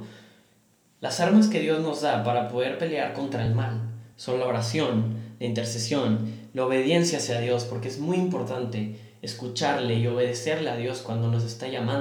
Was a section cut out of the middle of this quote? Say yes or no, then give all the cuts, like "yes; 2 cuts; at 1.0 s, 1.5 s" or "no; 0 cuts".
no; 0 cuts